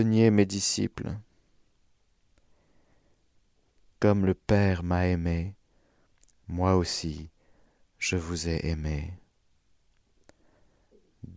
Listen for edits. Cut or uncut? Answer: uncut